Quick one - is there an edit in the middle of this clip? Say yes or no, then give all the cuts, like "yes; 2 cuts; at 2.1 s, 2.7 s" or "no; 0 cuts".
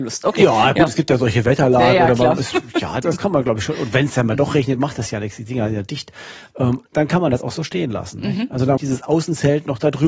yes; 3 cuts; at 3.0 s, 6.9 s, 8.8 s